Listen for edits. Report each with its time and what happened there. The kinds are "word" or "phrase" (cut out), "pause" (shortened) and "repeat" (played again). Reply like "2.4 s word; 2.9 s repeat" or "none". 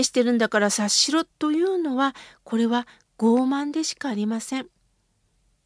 1.3 s pause